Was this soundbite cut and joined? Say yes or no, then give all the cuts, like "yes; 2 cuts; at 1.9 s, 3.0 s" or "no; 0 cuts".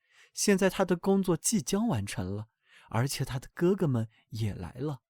no; 0 cuts